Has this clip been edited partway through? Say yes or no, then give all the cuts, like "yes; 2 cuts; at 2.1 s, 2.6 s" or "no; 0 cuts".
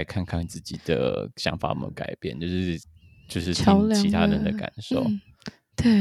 no; 0 cuts